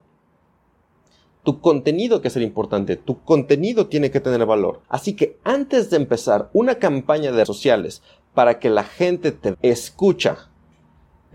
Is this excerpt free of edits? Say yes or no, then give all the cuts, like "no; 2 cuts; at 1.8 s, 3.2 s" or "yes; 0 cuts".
no; 4 cuts; at 2.2 s, 4.8 s, 7.4 s, 9.5 s